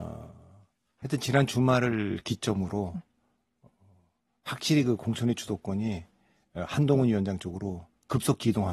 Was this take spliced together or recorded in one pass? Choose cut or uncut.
uncut